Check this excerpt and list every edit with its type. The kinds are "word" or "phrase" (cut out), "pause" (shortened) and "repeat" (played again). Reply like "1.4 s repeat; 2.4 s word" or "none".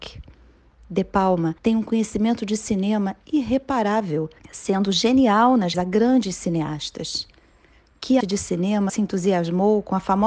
1.6 s pause; 4.4 s pause; 5.7 s word; 8.2 s word; 8.9 s word